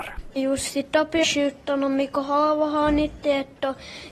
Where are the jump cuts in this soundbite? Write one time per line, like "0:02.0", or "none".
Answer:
0:01.2